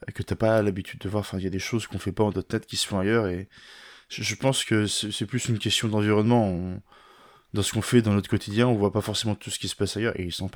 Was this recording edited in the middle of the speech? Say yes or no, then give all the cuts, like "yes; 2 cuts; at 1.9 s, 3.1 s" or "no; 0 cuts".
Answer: no; 0 cuts